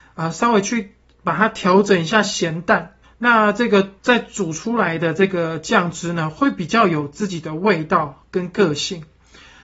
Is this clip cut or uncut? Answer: cut